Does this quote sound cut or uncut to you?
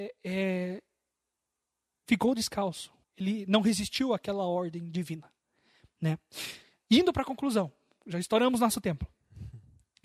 cut